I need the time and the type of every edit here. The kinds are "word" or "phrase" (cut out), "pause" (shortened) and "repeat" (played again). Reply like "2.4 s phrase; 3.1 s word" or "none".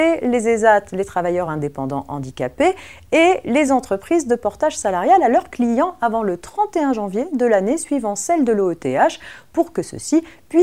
none

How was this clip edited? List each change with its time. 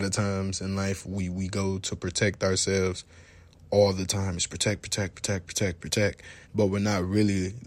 6.4 s pause

